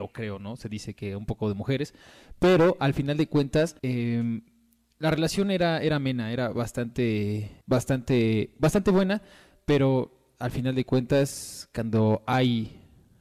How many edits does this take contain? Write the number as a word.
two